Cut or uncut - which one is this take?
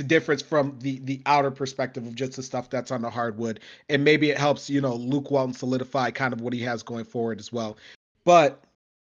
uncut